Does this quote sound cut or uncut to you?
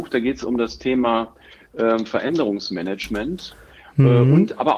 uncut